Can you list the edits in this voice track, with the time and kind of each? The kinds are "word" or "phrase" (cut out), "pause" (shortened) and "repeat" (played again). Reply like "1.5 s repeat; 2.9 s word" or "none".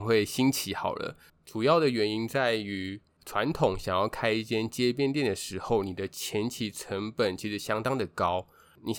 none